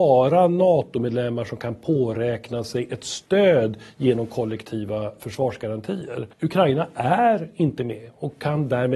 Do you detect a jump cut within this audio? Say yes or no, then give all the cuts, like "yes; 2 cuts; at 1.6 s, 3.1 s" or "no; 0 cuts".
yes; 1 cut; at 6.3 s